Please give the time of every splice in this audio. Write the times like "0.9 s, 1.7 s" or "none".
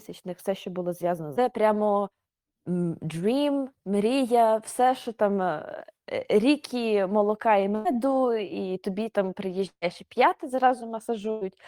1.4 s